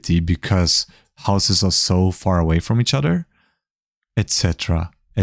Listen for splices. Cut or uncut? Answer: uncut